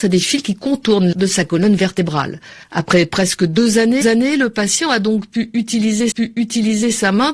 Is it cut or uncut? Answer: cut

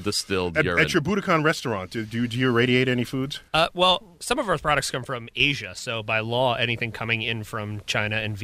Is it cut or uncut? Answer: cut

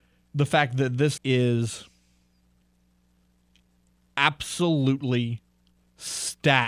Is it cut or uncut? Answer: cut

